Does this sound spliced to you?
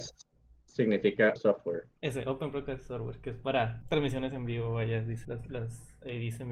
yes; 3 cuts; at 1.4 s, 3.8 s, 5.2 s

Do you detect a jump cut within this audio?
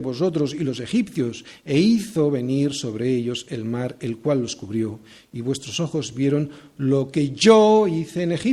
no; 0 cuts

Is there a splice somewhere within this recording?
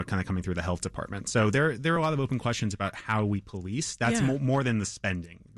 no; 0 cuts

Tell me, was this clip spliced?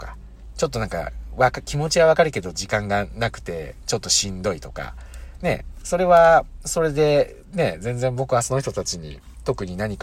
no; 0 cuts

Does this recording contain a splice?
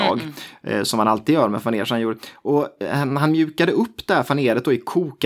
no; 0 cuts

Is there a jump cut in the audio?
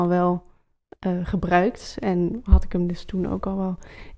no; 0 cuts

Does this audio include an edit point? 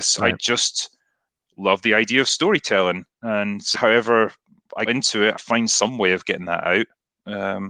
yes; 3 cuts; at 3.7 s, 4.9 s, 5.4 s

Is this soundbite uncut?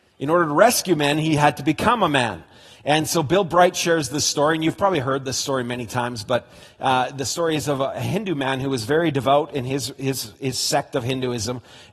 yes; 0 cuts

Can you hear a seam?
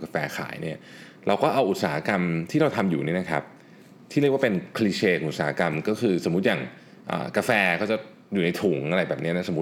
no; 0 cuts

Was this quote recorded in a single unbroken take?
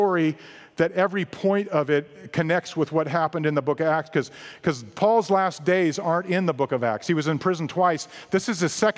yes; 0 cuts

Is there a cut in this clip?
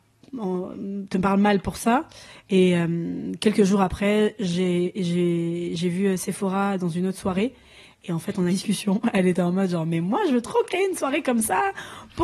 yes; 1 cut; at 8.5 s

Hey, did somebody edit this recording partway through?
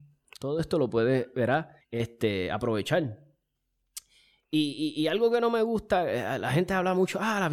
yes; 1 cut; at 1.8 s

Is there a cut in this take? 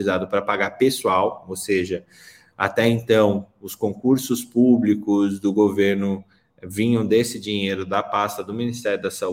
no; 0 cuts

